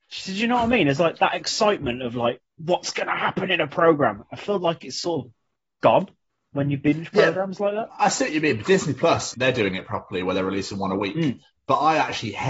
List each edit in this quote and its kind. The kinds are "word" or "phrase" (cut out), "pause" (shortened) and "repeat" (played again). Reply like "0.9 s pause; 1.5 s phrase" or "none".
9.3 s phrase